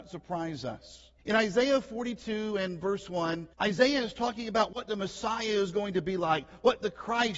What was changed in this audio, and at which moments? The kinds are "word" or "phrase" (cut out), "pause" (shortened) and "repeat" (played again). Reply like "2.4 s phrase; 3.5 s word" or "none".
1.2 s pause; 3.5 s pause